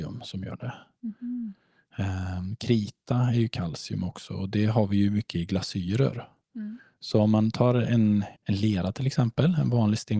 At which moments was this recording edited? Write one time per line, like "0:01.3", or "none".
0:08.4